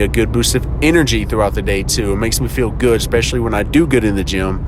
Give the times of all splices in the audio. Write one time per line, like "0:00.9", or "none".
none